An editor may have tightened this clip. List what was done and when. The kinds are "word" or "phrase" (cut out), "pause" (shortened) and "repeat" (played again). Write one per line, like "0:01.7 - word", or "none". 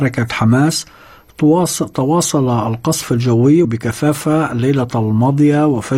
0:03.6 - phrase